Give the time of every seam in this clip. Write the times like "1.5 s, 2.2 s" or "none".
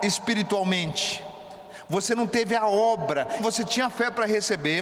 3.4 s